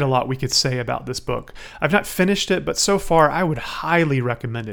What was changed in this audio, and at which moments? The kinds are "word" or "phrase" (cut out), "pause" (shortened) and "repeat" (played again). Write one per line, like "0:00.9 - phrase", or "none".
none